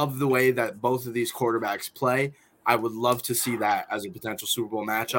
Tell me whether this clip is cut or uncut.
uncut